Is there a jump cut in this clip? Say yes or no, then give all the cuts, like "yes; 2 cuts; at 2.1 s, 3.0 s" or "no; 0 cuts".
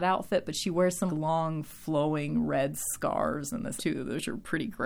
yes; 2 cuts; at 1.1 s, 3.8 s